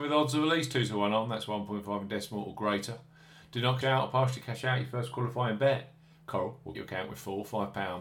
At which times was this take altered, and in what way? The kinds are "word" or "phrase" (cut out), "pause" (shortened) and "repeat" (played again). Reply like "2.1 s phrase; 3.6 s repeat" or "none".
3.8 s word; 6.7 s word